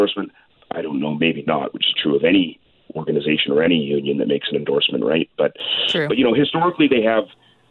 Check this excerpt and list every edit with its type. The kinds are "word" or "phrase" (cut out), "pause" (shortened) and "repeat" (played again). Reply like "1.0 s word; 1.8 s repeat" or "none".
1.9 s word